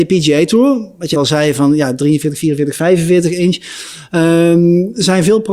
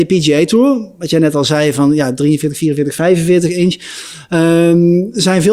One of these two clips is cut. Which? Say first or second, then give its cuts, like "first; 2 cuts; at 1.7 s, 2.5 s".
first; 1 cut; at 1.1 s